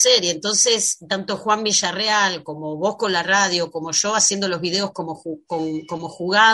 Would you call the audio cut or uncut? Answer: uncut